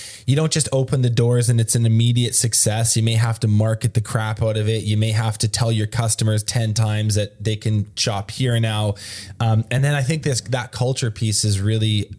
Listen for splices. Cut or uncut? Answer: uncut